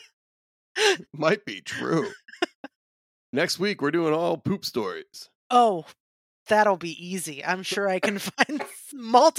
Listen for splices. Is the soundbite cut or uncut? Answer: uncut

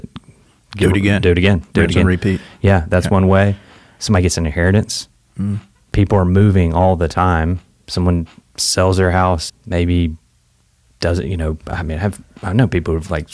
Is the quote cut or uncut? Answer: cut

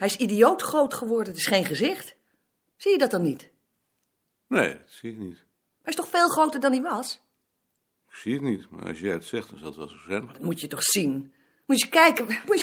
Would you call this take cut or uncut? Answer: uncut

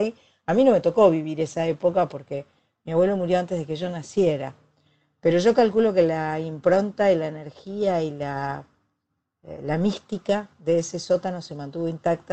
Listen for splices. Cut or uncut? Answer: uncut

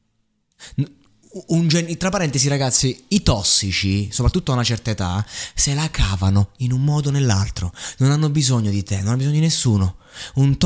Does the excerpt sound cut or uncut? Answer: uncut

